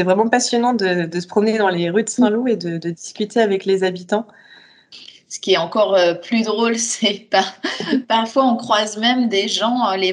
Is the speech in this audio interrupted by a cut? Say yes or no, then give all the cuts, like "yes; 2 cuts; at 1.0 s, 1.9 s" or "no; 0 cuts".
no; 0 cuts